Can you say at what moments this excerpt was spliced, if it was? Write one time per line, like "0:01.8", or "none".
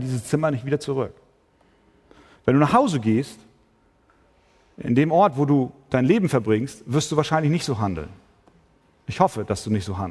none